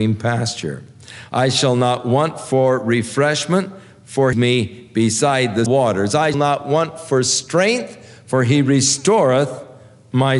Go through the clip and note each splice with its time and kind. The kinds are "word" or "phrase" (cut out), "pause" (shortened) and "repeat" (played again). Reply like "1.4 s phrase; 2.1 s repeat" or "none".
4.3 s phrase; 5.7 s word; 6.3 s word